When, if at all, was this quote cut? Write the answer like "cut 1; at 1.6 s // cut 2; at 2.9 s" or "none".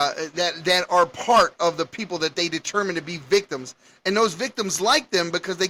none